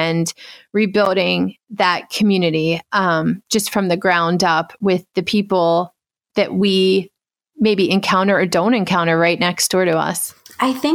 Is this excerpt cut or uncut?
uncut